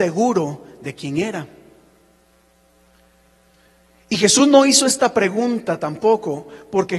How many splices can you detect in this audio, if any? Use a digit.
0